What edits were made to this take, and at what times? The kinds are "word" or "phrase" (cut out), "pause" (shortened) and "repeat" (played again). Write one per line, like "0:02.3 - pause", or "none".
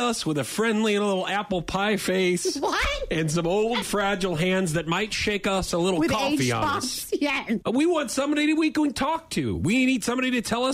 0:03.8 - word